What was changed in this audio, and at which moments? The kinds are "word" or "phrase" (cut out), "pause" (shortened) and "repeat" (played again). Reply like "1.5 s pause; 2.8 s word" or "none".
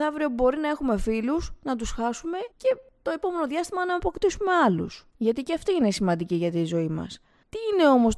2.5 s pause; 5.1 s pause